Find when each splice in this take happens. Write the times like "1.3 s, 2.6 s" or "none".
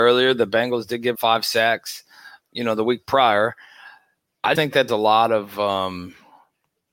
1.1 s, 2.4 s, 4.5 s, 4.9 s